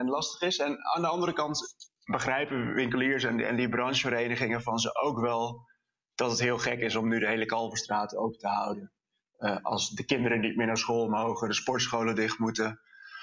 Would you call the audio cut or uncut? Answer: uncut